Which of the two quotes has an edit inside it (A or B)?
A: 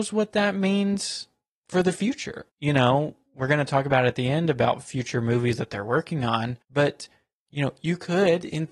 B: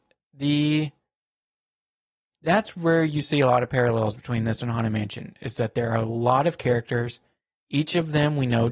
A